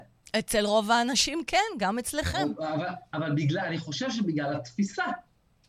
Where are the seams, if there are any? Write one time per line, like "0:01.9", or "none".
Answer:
none